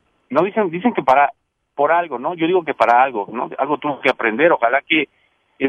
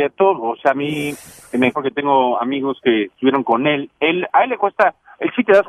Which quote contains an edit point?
second; 1 cut; at 1.7 s

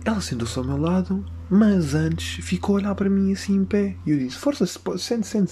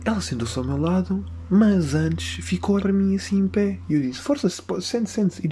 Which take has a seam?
second; 1 cut; at 2.8 s

